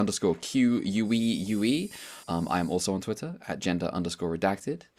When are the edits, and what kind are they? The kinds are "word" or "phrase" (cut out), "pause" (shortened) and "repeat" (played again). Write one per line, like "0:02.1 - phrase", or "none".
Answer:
0:02.2 - pause

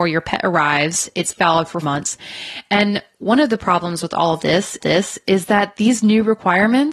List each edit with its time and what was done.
0:01.4 - word
0:01.8 - word
0:04.8 - repeat

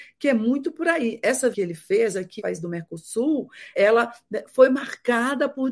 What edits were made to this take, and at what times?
0:01.5 - word
0:02.4 - word
0:03.7 - word

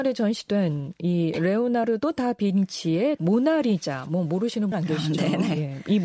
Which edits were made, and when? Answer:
0:03.2 - word
0:04.7 - word

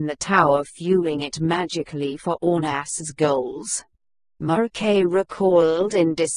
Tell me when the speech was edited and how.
none

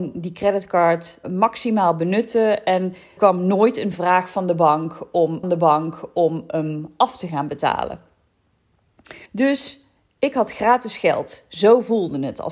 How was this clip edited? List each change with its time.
0:01.2 - word
0:03.2 - word
0:05.4 - repeat
0:09.3 - pause

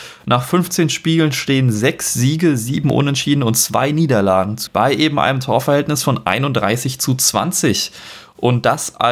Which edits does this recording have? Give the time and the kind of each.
0:04.7 - word

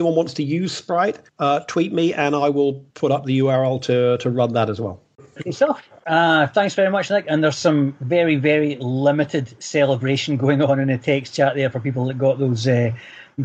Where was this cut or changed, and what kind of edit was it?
0:01.3 - pause
0:02.9 - pause

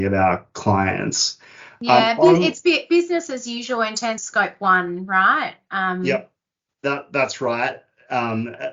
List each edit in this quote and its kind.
0:04.2 - word

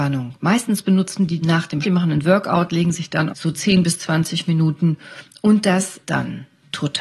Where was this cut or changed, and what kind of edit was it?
0:01.4 - word
0:01.8 - word
0:03.3 - phrase
0:06.0 - word

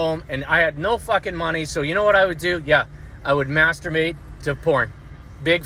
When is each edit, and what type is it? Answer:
0:04.4 - word

